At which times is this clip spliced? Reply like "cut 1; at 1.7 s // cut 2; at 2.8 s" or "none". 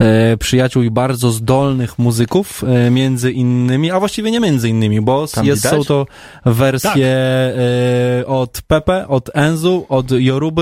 none